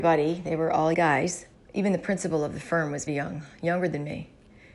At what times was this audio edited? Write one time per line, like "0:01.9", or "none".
0:00.9
0:01.5
0:03.1